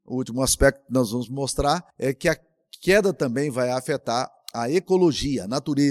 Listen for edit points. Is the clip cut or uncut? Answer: cut